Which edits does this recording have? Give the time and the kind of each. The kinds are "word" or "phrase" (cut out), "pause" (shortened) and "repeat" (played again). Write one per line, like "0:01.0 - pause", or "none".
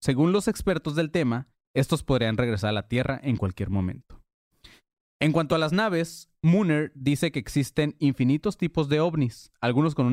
none

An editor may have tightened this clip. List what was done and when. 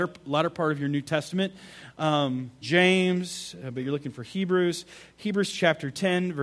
0:02.6 - word

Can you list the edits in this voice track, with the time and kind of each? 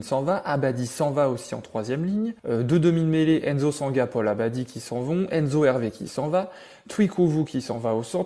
0:02.4 - pause

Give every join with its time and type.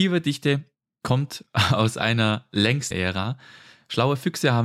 0:02.9 - word

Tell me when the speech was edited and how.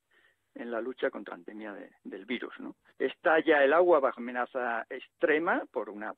0:01.3 - word
0:02.0 - pause
0:02.9 - pause
0:04.2 - word

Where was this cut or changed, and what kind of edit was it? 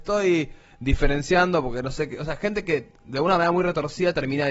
none

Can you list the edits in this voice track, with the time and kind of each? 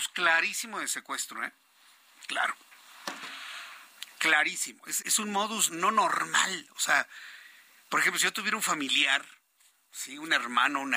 0:05.0 - word
0:05.7 - word

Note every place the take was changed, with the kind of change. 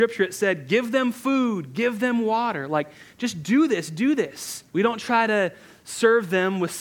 0:04.7 - pause

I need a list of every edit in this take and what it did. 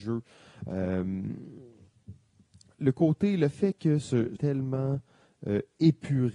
0:04.4 - phrase

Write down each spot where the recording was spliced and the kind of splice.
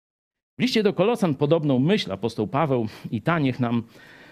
none

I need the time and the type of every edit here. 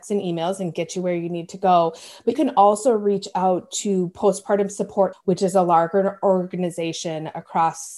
0:02.3 - word
0:05.1 - word

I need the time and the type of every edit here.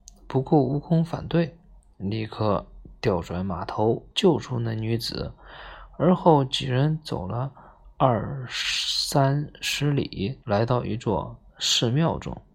0:04.1 - pause
0:10.4 - pause

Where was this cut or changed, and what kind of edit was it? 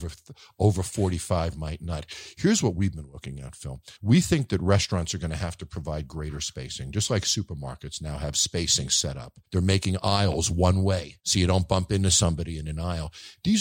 0:04.0 - pause
0:09.5 - pause
0:11.2 - pause

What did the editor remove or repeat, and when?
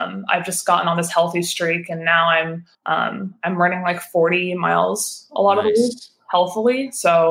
0:02.7 - pause

